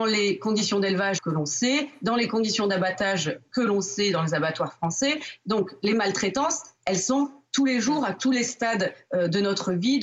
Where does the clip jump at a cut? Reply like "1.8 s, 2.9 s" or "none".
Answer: 1.2 s